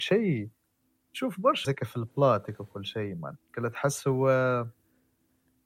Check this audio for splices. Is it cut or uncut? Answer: cut